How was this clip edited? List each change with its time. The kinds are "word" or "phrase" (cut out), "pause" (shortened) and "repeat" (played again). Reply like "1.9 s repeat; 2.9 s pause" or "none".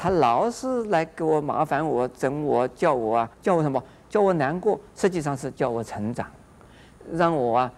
3.3 s pause